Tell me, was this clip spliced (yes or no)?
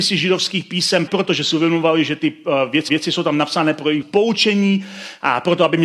yes